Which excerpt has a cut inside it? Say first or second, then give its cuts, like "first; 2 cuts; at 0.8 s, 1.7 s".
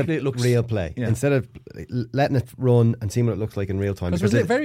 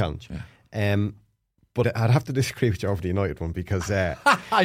second; 1 cut; at 1.8 s